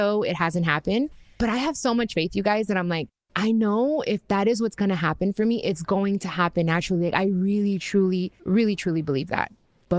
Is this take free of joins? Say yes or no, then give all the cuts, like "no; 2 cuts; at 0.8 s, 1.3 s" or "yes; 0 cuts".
no; 1 cut; at 8.4 s